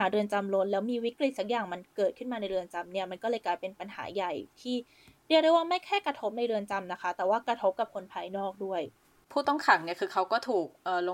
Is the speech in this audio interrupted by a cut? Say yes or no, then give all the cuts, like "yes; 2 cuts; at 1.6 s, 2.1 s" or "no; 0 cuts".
no; 0 cuts